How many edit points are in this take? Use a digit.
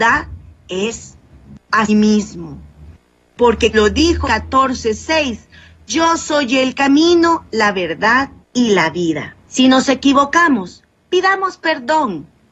5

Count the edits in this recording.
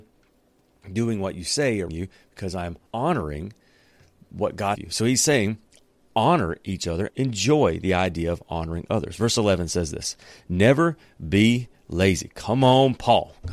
4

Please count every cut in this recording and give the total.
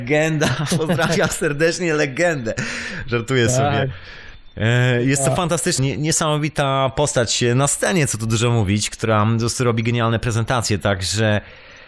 1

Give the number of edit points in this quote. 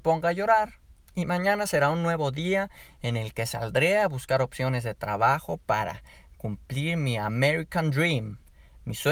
0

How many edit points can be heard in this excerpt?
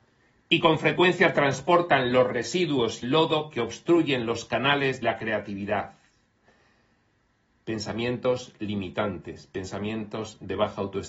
2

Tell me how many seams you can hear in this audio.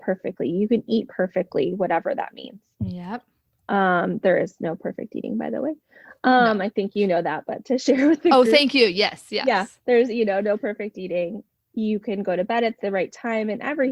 0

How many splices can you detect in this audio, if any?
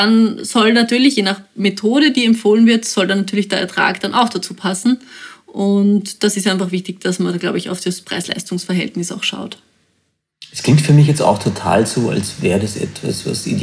0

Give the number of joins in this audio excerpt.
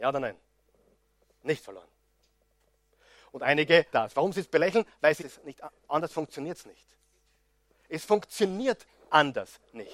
3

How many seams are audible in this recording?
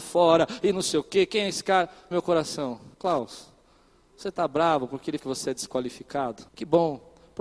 4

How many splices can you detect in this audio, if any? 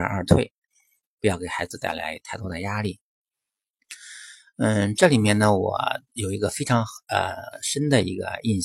1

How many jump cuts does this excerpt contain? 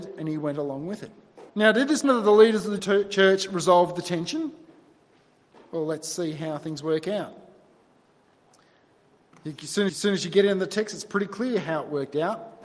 4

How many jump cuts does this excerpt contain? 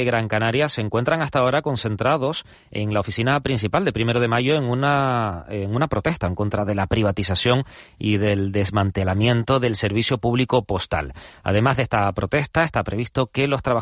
0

